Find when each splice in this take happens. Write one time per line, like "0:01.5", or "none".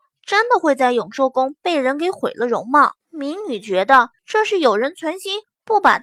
0:03.0
0:04.2